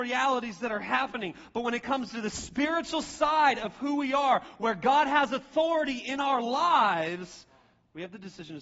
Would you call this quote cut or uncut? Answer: uncut